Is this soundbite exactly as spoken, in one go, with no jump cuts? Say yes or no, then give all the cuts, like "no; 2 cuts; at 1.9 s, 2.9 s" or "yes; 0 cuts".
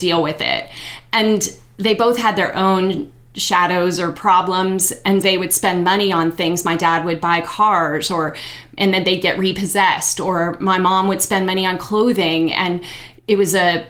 no; 1 cut; at 5.2 s